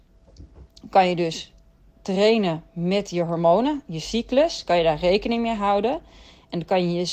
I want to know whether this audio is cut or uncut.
uncut